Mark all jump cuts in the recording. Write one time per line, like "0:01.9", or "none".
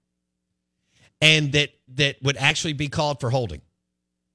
none

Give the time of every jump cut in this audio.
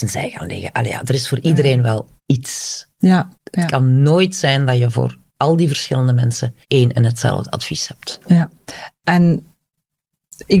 0:02.2
0:03.3
0:05.3
0:06.6

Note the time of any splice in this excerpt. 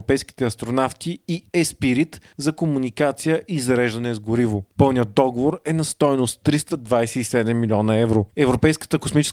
none

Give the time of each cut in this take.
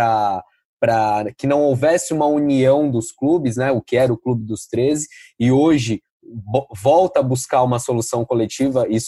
none

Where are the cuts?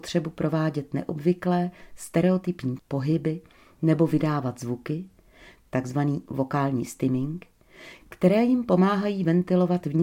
0:02.8

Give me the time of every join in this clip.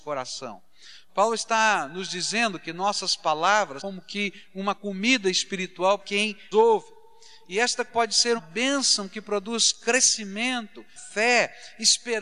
0:03.8
0:06.0
0:06.5
0:07.9
0:08.4
0:10.9

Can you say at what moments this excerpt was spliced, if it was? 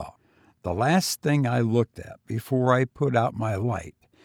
none

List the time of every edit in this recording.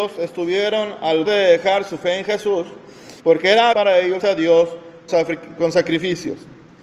0:01.3
0:03.2
0:03.7
0:04.2
0:05.1

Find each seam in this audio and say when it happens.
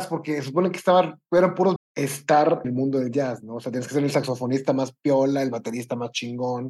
0:01.8
0:02.6

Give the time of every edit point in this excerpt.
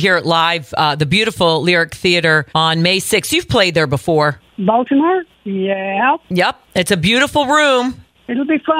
0:02.5
0:06.7

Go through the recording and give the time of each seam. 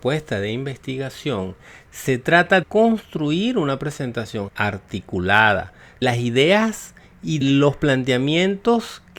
0:02.6
0:04.5
0:06.0
0:07.4

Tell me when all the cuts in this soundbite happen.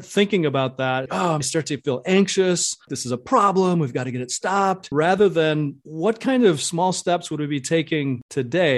0:01.1
0:01.4

